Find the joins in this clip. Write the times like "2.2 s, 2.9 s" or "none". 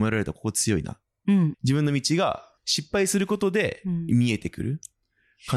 1.5 s, 2.6 s